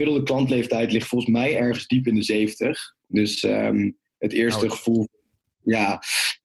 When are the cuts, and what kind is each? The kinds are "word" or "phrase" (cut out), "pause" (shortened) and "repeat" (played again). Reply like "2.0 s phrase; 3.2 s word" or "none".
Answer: none